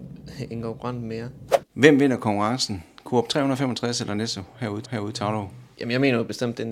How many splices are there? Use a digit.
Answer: 2